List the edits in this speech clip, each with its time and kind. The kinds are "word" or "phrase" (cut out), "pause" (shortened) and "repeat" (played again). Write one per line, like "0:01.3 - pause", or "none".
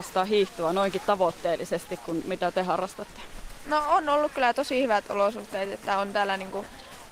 none